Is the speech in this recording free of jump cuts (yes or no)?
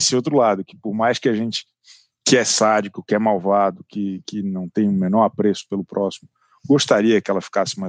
yes